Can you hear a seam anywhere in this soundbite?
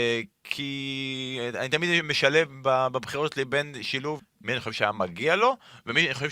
yes; 1 cut; at 4.2 s

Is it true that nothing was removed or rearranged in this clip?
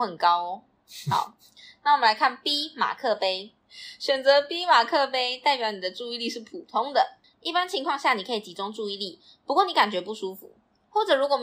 yes; 0 cuts

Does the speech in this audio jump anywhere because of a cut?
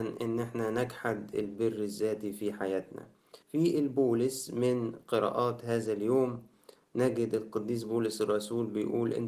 yes; 1 cut; at 3.4 s

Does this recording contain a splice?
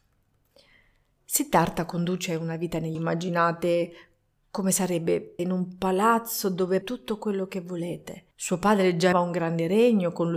yes; 5 cuts; at 2.9 s, 5.4 s, 6.8 s, 8.3 s, 9.1 s

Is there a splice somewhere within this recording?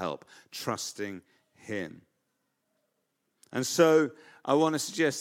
no; 0 cuts

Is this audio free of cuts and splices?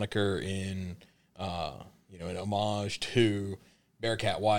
yes; 0 cuts

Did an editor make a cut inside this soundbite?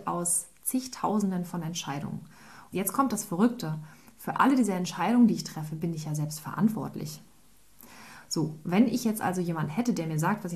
no; 0 cuts

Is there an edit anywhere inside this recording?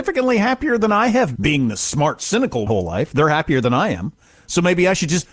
yes; 2 cuts; at 1.4 s, 2.7 s

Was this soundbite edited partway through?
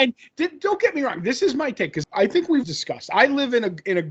yes; 2 cuts; at 2.0 s, 2.6 s

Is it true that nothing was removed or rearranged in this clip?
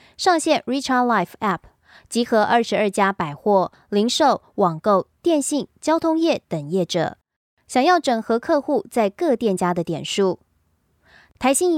yes; 0 cuts

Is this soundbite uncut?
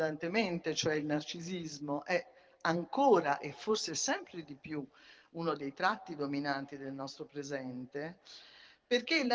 yes; 0 cuts

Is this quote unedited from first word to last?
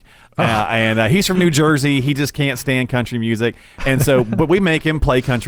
yes; 0 cuts

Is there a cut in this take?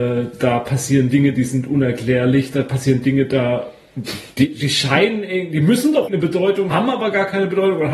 yes; 2 cuts; at 6.1 s, 6.7 s

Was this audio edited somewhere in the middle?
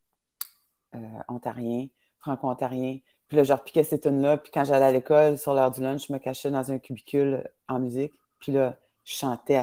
no; 0 cuts

